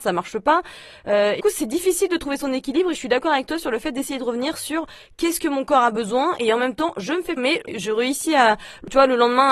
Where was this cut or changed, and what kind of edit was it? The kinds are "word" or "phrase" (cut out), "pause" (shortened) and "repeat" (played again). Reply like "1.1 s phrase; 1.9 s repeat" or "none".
1.4 s word; 7.4 s word

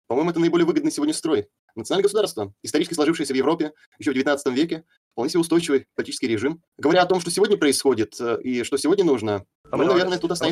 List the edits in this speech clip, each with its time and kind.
6.7 s pause

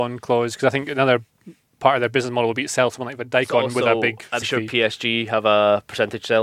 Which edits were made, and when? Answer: 4.4 s word

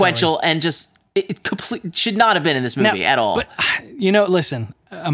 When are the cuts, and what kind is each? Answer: none

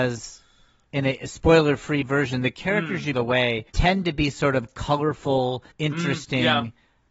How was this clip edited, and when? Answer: 3.1 s phrase; 3.7 s pause; 5.7 s pause

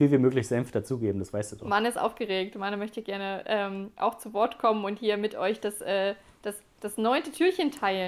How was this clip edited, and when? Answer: none

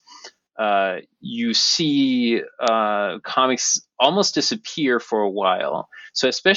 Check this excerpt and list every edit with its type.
none

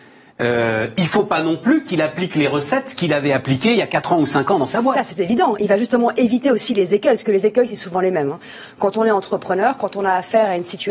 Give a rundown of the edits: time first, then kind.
none

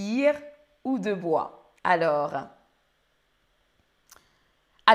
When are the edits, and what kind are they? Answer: 1.8 s pause

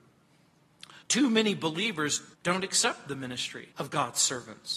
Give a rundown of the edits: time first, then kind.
1.0 s pause; 2.3 s pause; 3.7 s pause

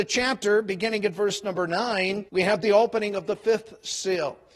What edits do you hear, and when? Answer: 2.3 s pause

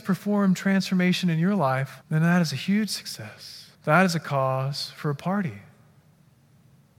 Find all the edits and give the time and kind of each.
2.0 s pause; 3.7 s pause

